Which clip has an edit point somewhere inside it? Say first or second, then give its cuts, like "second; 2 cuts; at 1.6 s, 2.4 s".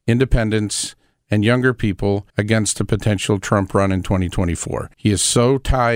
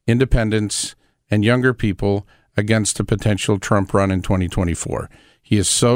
first; 2 cuts; at 2.3 s, 4.9 s